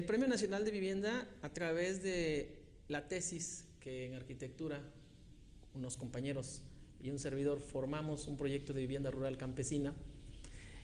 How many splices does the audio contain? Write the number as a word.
zero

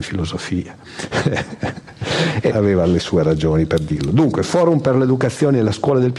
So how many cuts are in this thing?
one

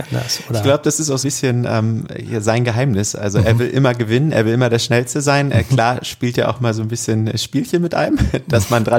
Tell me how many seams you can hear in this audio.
one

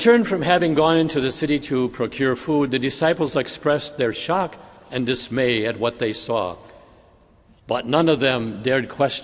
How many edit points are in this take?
zero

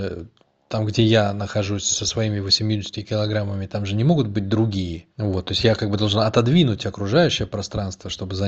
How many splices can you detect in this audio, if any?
one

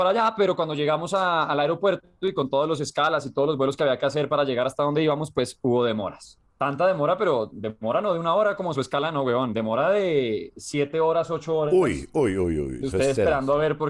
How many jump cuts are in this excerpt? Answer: one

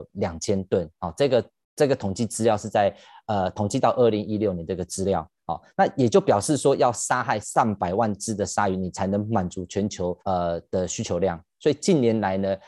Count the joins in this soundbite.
one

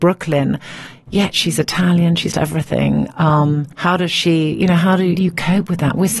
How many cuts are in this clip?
three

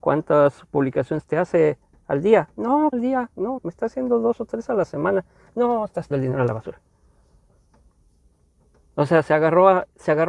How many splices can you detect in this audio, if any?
three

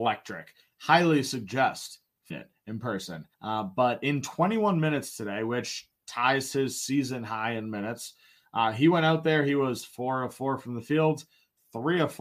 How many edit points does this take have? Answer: two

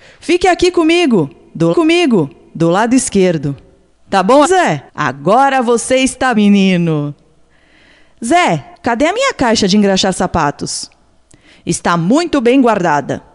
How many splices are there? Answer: six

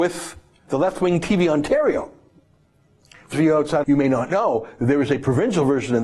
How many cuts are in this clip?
two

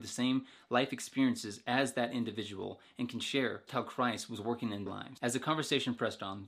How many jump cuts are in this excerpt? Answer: two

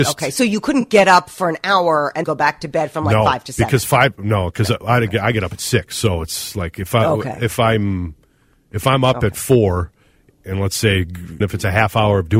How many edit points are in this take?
two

